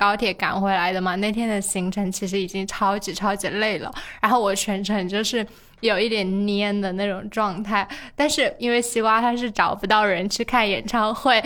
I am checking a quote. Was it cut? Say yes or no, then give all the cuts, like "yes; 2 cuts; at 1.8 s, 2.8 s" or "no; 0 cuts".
no; 0 cuts